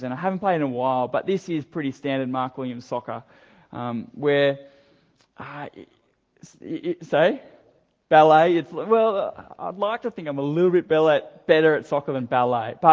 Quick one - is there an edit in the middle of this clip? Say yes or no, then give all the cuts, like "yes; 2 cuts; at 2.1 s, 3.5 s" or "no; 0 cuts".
no; 0 cuts